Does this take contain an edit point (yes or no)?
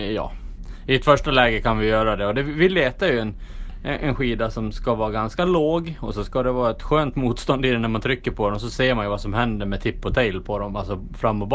no